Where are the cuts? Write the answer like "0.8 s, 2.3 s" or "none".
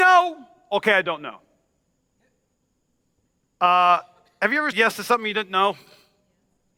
4.7 s